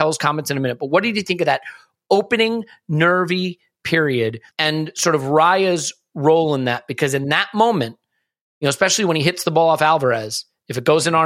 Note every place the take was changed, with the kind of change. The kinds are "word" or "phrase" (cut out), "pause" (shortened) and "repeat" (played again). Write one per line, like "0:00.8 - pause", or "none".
0:04.5 - pause

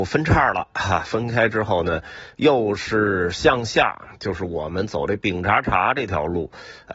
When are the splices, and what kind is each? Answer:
0:04.1 - pause

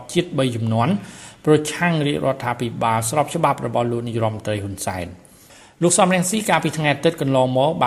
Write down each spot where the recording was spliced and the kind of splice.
none

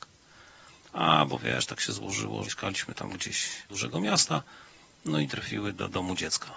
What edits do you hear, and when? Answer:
0:02.4 - word
0:03.7 - word
0:05.3 - word

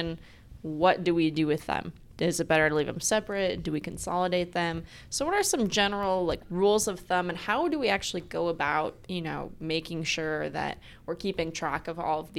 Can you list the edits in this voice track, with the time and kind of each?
0:09.0 - pause

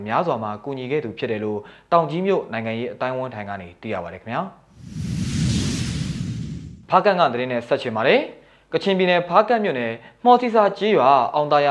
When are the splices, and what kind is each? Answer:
none

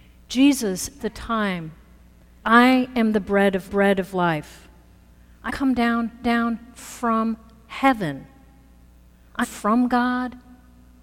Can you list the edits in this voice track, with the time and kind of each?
0:01.0 - word
0:02.4 - word
0:03.7 - repeat
0:05.5 - word
0:06.2 - repeat
0:09.4 - word

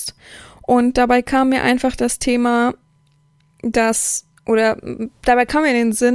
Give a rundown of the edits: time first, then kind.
none

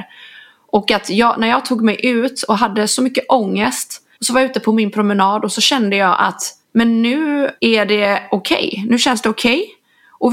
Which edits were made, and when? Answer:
0:04.1 - pause
0:06.6 - pause
0:07.6 - pause

